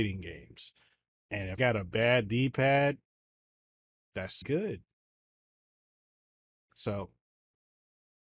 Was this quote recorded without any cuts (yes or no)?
no